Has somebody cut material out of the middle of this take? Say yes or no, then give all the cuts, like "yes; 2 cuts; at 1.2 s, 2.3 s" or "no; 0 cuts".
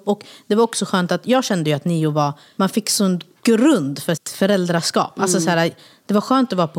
yes; 1 cut; at 4.2 s